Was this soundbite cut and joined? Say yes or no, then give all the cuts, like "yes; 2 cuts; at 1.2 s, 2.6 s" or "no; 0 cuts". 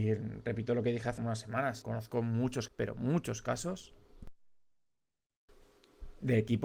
yes; 3 cuts; at 1.2 s, 1.8 s, 2.7 s